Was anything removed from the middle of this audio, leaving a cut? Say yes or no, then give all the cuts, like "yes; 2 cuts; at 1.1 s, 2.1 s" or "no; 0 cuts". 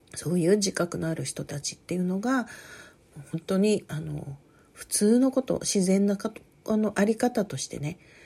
no; 0 cuts